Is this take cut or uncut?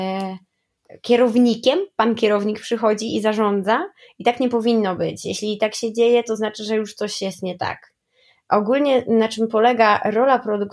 uncut